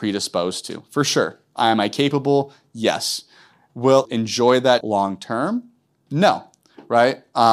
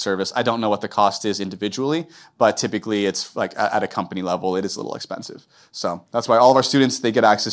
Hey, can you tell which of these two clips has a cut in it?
first; 2 cuts; at 4.1 s, 4.8 s

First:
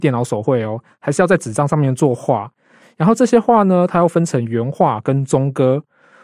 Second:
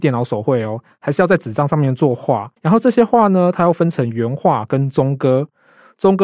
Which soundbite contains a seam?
second; 1 cut; at 2.6 s

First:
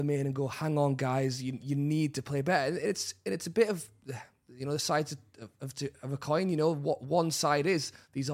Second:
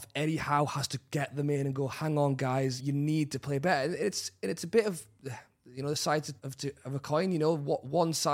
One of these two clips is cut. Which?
second; 2 cuts; at 2.8 s, 6.4 s

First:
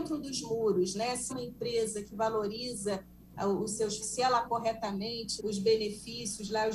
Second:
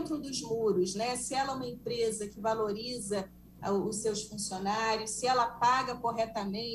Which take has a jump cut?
first; 4 cuts; at 1.3 s, 4.0 s, 4.4 s, 5.4 s

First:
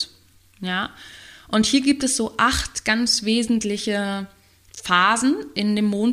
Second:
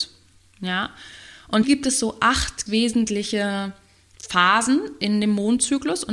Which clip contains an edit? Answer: second; 2 cuts; at 1.6 s, 2.7 s

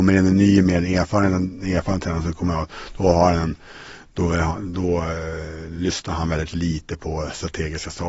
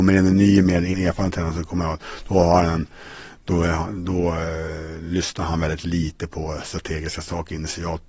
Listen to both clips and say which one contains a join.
second; 1 cut; at 0.9 s

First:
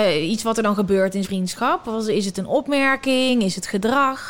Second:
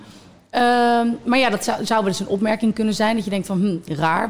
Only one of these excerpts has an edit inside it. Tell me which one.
first; 1 cut; at 1.2 s

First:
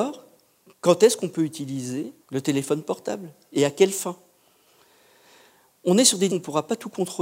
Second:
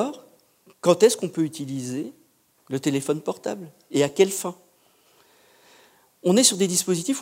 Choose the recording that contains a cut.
first; 2 cuts; at 2.2 s, 6.3 s

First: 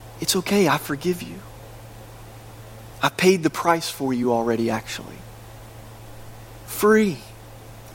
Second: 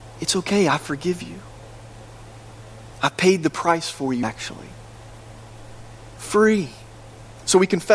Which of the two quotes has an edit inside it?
second; 1 cut; at 4.2 s

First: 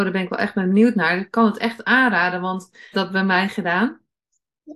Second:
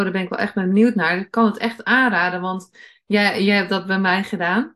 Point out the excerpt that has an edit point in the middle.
first; 1 cut; at 2.9 s

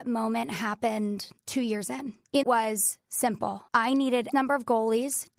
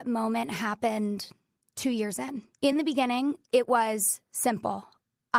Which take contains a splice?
first; 4 cuts; at 1.4 s, 2.4 s, 3.7 s, 4.3 s

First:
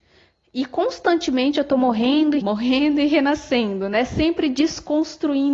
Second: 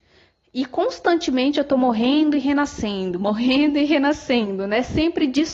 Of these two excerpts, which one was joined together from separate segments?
first; 1 cut; at 2.4 s

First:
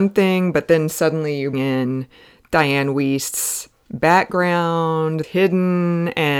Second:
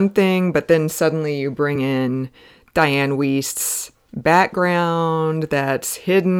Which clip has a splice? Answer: first; 2 cuts; at 1.5 s, 5.2 s

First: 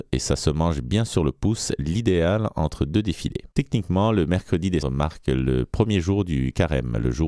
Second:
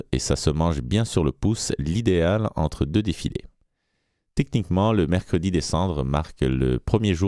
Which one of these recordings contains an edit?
first; 2 cuts; at 3.5 s, 4.8 s

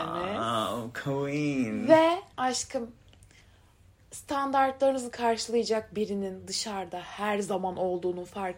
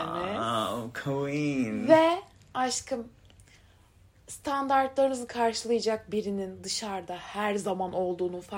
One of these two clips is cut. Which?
first; 1 cut; at 2.3 s

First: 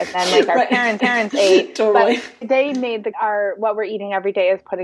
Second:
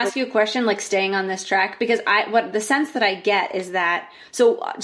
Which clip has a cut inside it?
first; 3 cuts; at 1.0 s, 2.4 s, 3.1 s

